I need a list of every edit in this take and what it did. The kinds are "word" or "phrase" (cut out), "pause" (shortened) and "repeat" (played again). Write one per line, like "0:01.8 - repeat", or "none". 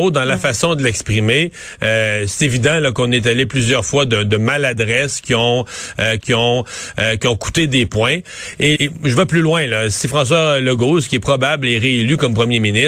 0:06.2 - repeat
0:08.8 - word